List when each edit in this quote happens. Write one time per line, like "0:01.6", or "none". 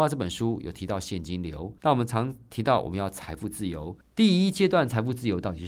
0:01.8
0:04.0